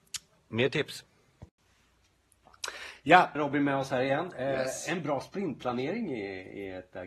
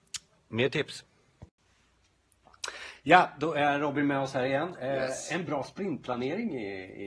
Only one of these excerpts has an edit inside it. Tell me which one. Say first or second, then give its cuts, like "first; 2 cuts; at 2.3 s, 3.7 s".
first; 1 cut; at 3.4 s